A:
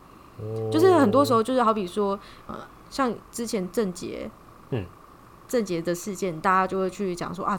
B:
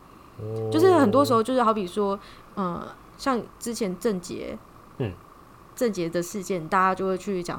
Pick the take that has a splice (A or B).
A